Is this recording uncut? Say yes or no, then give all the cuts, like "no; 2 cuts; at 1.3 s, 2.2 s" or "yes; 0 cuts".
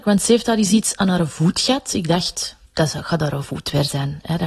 no; 1 cut; at 2.7 s